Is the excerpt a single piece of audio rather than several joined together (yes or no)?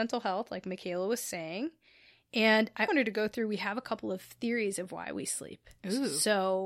no